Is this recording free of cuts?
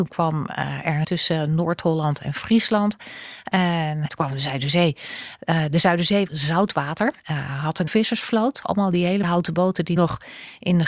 no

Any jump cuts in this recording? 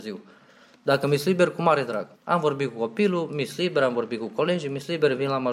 yes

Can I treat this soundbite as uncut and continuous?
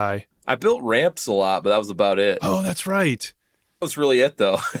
no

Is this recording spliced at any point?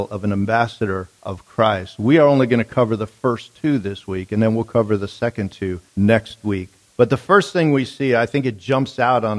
yes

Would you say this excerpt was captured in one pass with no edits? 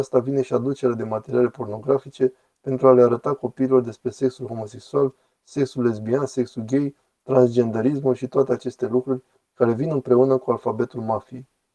yes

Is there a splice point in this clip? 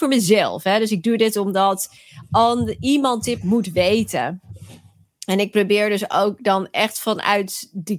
no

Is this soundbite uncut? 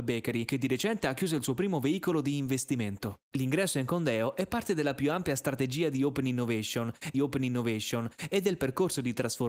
no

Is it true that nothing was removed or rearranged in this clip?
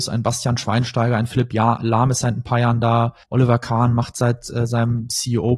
no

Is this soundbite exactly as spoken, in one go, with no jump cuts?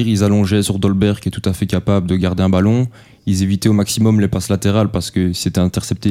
yes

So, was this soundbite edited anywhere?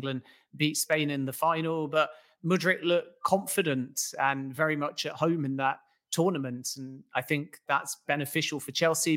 no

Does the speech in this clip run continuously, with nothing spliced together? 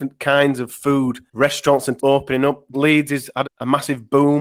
no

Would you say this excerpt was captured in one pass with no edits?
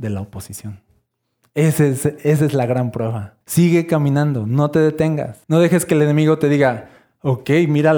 no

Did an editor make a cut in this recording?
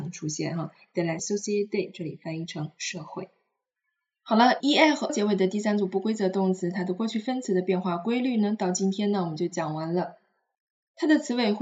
yes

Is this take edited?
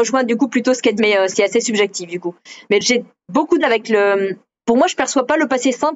yes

